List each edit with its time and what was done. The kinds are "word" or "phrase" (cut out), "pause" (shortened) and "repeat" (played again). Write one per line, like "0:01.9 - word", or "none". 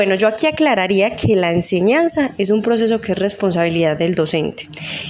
none